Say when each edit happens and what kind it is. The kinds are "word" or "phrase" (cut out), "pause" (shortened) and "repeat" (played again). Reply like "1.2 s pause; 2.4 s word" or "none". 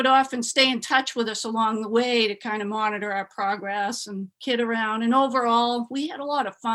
4.3 s pause